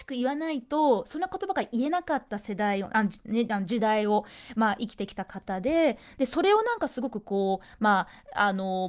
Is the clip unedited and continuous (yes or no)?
yes